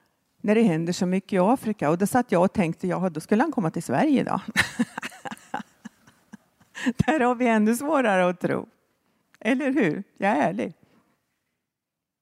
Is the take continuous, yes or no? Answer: yes